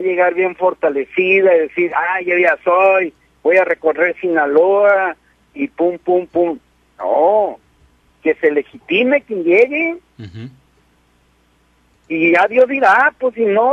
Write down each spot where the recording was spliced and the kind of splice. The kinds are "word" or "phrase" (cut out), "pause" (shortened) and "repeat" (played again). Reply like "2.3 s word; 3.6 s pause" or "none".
none

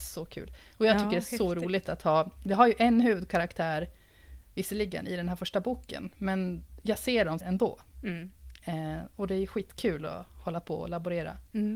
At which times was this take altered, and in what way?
7.4 s phrase

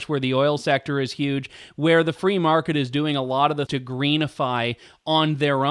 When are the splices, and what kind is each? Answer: 3.7 s word

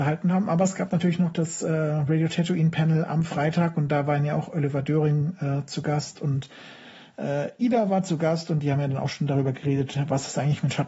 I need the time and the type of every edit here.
none

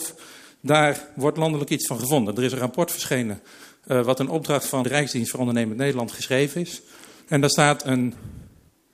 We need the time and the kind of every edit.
4.8 s word

